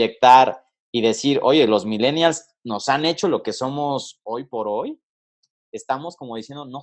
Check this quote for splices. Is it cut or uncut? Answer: uncut